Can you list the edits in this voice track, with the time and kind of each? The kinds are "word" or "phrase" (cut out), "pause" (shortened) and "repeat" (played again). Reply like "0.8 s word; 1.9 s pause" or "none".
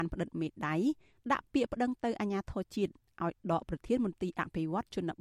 none